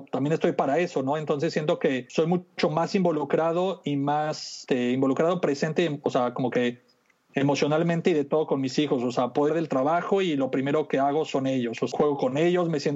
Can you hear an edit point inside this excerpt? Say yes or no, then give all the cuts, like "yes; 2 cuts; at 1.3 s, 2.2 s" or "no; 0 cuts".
yes; 1 cut; at 9.5 s